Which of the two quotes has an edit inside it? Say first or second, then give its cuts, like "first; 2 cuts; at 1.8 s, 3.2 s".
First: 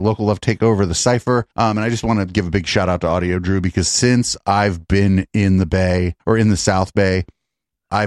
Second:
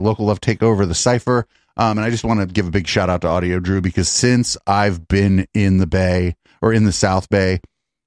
first; 2 cuts; at 1.5 s, 6.2 s